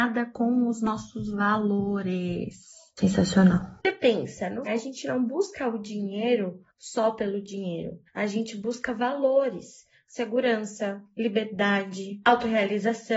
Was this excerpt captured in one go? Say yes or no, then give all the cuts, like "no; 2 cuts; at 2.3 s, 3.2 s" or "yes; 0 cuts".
no; 3 cuts; at 4.7 s, 6.7 s, 8.1 s